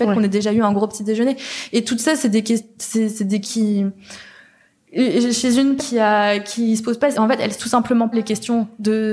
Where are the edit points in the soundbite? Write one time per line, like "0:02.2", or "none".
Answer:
0:03.4
0:05.8
0:07.1
0:07.6
0:08.1